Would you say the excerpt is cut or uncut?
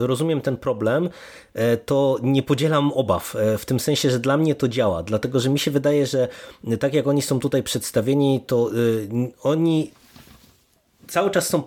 uncut